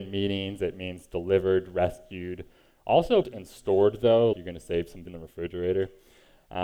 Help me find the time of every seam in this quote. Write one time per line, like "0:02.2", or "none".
0:03.2
0:04.3
0:05.0

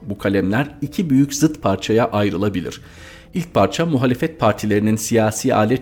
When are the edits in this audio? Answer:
none

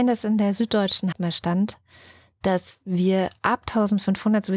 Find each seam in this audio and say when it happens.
0:01.1

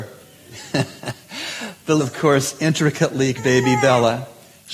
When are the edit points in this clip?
0:02.0
0:03.4

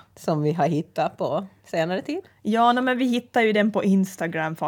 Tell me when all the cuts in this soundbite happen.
none

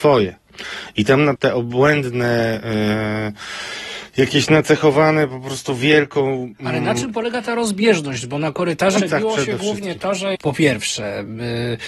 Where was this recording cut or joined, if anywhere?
0:01.4
0:09.0
0:10.3

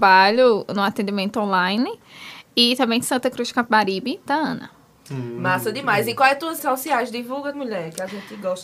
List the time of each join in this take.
0:03.0
0:04.3
0:06.6
0:07.5

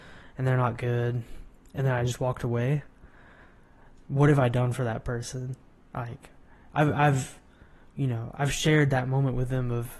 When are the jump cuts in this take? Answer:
none

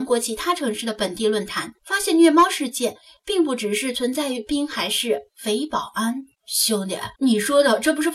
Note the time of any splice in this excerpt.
0:01.8
0:05.3
0:06.3
0:07.1

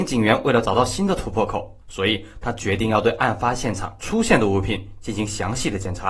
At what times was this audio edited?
0:01.8

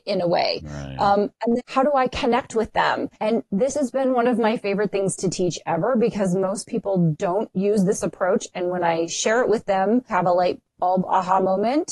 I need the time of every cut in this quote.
0:01.6
0:03.1
0:10.1

